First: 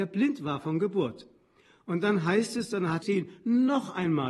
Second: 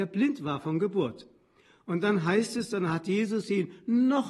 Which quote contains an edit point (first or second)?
first